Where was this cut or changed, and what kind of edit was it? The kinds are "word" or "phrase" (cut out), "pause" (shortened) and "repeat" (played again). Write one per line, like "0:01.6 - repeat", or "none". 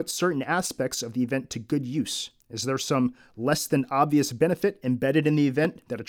0:02.4 - pause